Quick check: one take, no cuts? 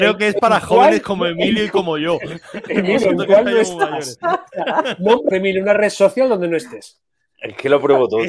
no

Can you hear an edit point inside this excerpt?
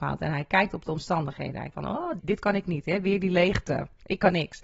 yes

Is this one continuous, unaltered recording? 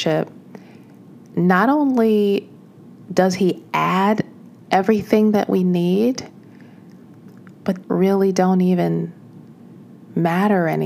no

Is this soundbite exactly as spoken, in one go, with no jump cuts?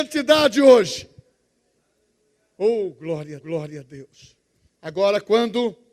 no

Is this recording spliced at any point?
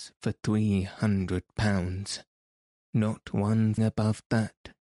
yes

